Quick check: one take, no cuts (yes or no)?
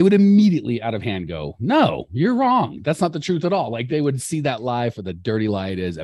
yes